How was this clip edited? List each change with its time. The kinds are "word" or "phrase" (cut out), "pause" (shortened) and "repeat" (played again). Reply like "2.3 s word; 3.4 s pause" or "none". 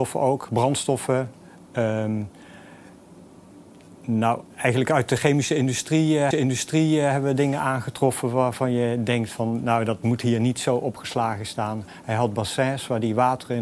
4.5 s pause; 6.3 s repeat